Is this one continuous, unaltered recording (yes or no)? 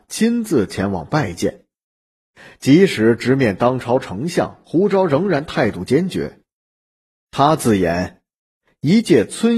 yes